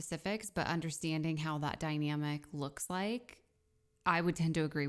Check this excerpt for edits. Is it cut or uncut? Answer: uncut